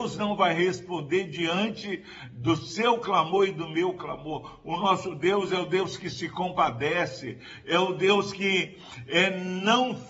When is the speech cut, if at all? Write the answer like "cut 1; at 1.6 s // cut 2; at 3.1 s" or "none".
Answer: none